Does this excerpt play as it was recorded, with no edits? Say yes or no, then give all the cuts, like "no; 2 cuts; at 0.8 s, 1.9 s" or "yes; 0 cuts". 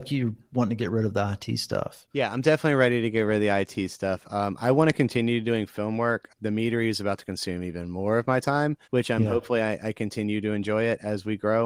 no; 2 cuts; at 2.1 s, 8.8 s